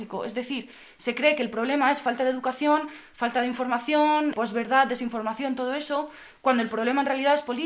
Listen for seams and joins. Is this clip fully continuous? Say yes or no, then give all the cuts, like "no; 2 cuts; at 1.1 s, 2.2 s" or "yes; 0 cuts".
no; 1 cut; at 4.3 s